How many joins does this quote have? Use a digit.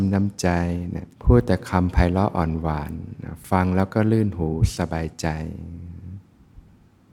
1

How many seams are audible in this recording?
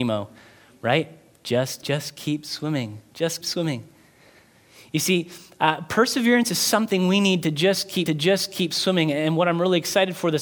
3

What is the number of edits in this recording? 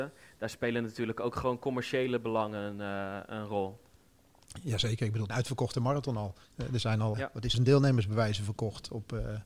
4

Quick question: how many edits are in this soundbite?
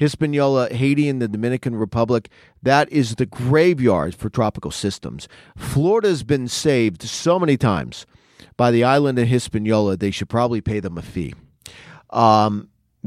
0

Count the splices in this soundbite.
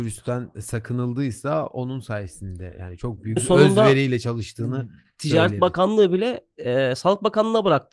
1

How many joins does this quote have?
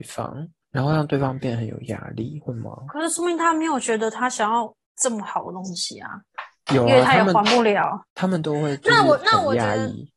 2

